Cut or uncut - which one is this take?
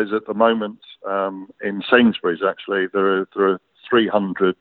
uncut